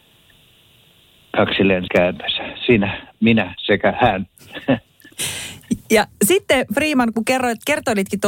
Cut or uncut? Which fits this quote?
cut